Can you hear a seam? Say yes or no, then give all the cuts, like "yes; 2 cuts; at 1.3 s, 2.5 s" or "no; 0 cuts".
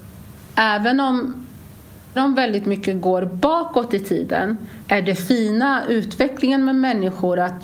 yes; 2 cuts; at 2.2 s, 4.9 s